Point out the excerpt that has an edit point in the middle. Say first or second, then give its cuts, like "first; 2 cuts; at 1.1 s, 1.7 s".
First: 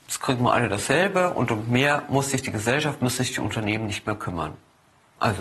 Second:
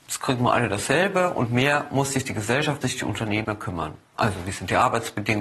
second; 4 cuts; at 1.5 s, 2.8 s, 3.4 s, 4.0 s